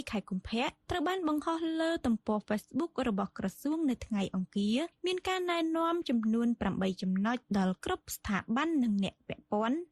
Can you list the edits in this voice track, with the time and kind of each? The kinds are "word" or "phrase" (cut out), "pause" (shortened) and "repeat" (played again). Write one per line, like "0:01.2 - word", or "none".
none